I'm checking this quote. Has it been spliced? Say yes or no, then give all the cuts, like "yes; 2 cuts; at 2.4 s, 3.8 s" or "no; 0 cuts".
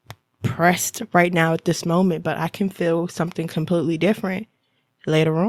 no; 0 cuts